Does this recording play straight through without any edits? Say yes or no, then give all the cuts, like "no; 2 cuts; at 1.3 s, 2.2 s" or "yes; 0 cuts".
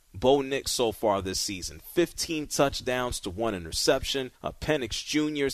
no; 1 cut; at 4.3 s